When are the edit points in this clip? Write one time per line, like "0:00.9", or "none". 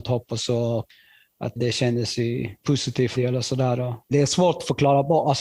0:01.6
0:02.6
0:03.2
0:04.1